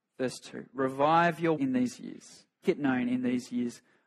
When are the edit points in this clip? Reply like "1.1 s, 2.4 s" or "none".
1.6 s, 2.6 s